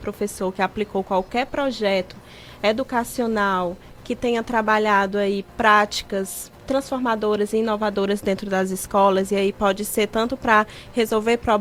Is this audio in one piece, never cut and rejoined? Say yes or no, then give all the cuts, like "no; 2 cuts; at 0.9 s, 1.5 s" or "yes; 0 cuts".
no; 1 cut; at 6.6 s